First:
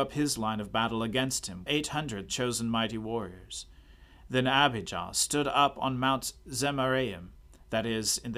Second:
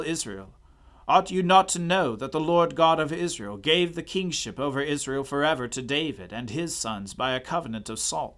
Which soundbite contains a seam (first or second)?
first